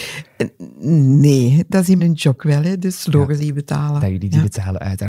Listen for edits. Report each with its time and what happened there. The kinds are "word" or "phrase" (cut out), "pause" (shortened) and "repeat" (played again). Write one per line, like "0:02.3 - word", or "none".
0:02.0 - word
0:02.4 - word
0:03.4 - word